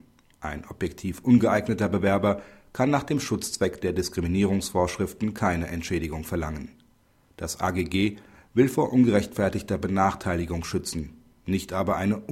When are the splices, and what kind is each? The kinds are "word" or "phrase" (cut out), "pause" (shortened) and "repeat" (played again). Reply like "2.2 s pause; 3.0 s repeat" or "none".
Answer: none

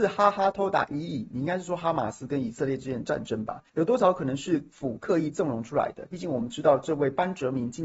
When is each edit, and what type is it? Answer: 3.7 s pause

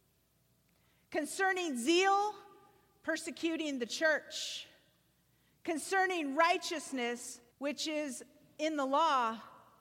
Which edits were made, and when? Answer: 7.5 s pause

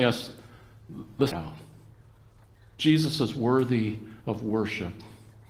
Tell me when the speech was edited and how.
1.3 s phrase; 4.2 s pause

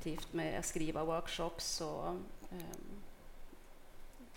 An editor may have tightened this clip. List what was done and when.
none

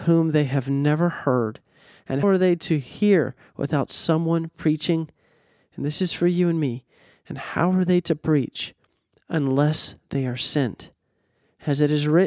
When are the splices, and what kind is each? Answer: 2.2 s word

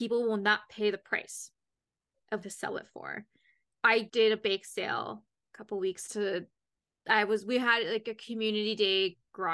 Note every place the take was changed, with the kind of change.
2.4 s phrase; 4.1 s word; 6.1 s phrase

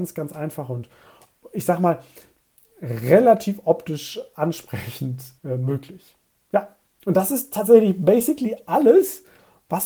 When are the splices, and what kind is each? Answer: 5.4 s pause; 6.9 s pause

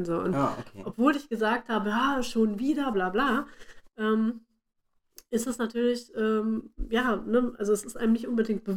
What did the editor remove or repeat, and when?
2.9 s word

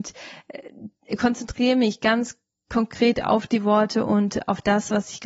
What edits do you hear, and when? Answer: none

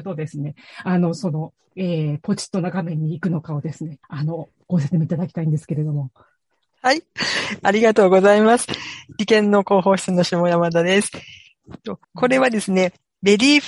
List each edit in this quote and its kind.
4.0 s pause; 12.0 s pause

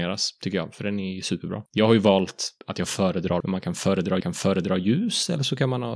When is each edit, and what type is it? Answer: 1.7 s pause; 2.6 s pause; 3.4 s word; 4.2 s repeat

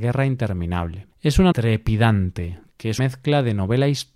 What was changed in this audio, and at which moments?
1.1 s pause; 1.5 s word; 3.0 s word

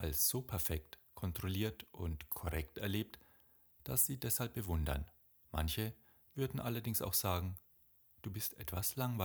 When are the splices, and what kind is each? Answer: 4.2 s word

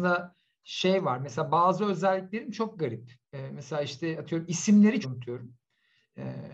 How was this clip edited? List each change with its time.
5.0 s phrase

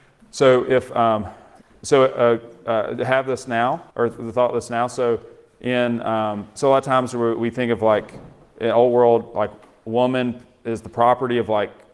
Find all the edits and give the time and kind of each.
3.9 s pause

